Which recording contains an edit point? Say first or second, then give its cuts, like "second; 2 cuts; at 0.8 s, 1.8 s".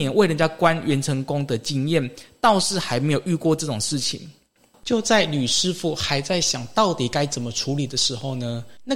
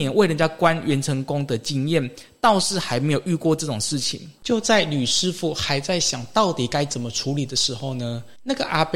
second; 1 cut; at 4.4 s